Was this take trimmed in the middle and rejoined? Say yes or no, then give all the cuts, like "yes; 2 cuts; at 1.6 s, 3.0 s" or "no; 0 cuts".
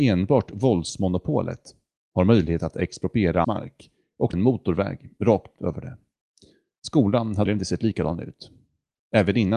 yes; 3 cuts; at 3.4 s, 4.3 s, 7.5 s